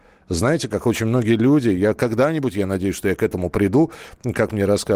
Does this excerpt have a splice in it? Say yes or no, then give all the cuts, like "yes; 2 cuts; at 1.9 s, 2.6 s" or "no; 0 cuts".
no; 0 cuts